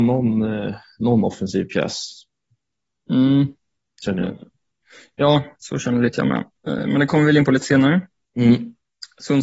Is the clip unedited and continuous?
yes; 0 cuts

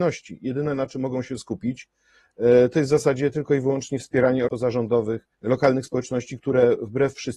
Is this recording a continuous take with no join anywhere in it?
no; 2 cuts; at 4.5 s, 5.3 s

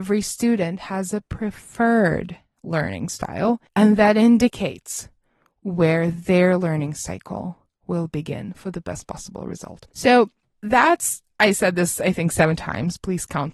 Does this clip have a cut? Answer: no; 0 cuts

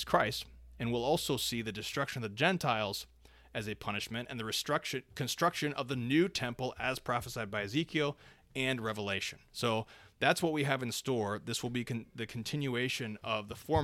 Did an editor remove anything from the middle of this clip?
no; 0 cuts

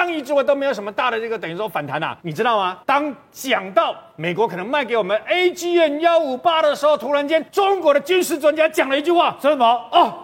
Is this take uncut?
no; 3 cuts; at 2.2 s, 2.8 s, 7.5 s

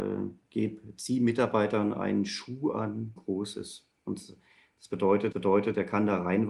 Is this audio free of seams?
no; 2 cuts; at 3.2 s, 5.3 s

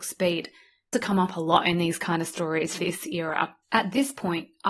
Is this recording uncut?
no; 3 cuts; at 0.9 s, 2.8 s, 3.6 s

